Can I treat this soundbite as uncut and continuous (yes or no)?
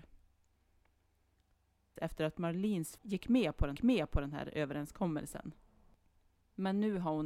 no